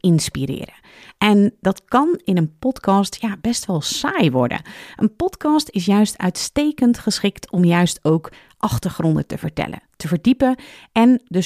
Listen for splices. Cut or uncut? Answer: uncut